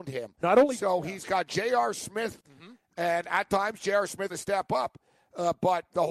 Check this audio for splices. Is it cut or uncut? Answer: cut